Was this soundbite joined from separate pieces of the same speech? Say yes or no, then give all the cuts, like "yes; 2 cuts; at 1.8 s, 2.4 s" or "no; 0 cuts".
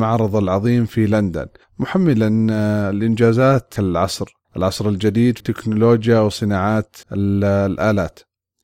yes; 5 cuts; at 1.6 s, 3.8 s, 4.4 s, 5.4 s, 7.0 s